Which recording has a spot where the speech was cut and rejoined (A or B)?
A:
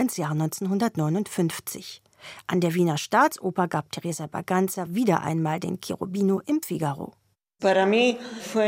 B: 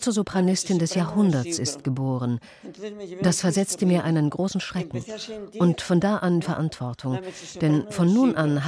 B